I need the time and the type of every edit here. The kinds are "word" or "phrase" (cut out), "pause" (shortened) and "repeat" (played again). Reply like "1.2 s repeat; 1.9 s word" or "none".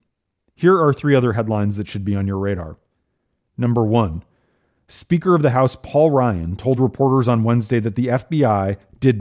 none